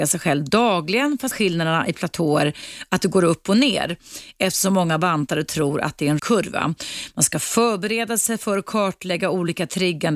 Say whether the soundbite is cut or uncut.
cut